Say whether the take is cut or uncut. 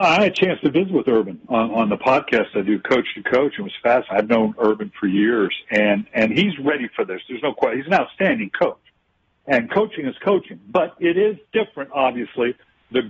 uncut